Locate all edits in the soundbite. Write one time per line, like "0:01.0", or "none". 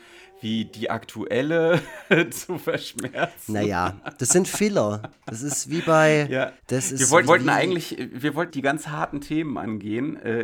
0:06.6
0:07.3
0:08.5